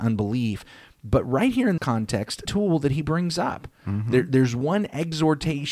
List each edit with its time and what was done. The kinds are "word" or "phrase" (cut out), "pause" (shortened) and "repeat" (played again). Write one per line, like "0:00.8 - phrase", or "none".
0:01.8 - word
0:02.5 - phrase

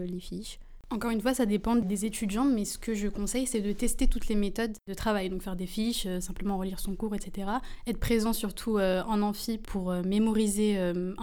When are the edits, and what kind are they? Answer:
none

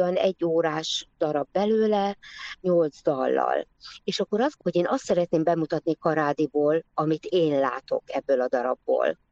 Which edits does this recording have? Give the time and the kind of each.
0:04.6 - word

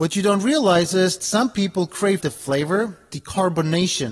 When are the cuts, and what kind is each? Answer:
0:01.2 - word
0:02.2 - word
0:03.1 - word

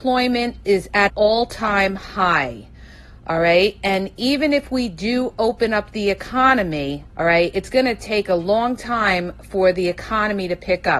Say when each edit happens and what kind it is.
0:01.1 - word
0:07.1 - pause

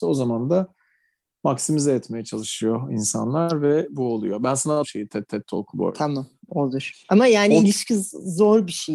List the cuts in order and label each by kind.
0:04.8 - phrase
0:05.3 - repeat

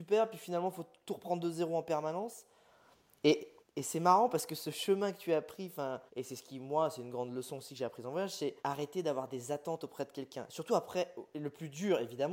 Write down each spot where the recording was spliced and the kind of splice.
0:03.6 - pause
0:06.1 - pause
0:08.6 - pause

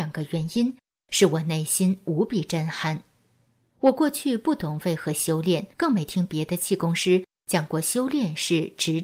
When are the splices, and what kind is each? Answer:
0:05.7 - pause

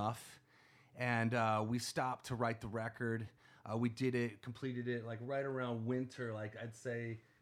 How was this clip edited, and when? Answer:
none

